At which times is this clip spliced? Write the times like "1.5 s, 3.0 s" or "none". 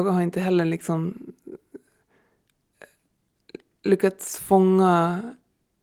none